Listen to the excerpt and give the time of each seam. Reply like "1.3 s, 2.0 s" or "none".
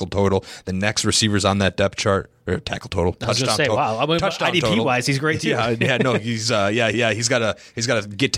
6.9 s